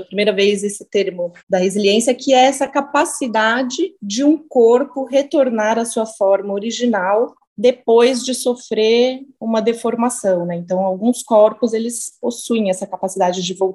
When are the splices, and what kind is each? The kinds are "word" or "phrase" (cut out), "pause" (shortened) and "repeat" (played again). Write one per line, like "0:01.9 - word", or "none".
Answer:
0:01.4 - pause
0:04.0 - pause
0:07.4 - pause

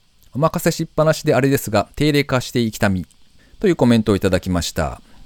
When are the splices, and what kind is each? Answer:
none

